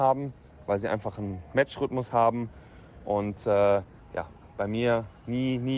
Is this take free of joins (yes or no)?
yes